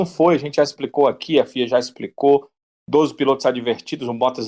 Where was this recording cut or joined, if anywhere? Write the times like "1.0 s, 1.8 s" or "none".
none